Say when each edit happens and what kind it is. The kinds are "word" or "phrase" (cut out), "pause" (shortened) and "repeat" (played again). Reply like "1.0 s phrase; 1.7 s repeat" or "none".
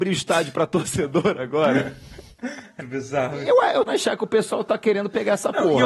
2.8 s word; 3.9 s phrase